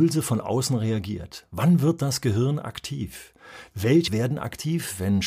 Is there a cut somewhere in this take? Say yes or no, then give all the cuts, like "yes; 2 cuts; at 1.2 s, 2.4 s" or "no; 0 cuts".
yes; 1 cut; at 4.1 s